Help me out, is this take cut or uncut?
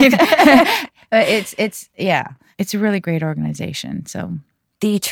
uncut